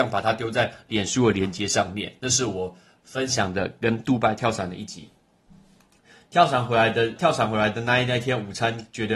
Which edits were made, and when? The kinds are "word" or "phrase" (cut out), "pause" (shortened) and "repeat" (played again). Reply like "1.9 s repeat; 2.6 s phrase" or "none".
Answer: 7.2 s word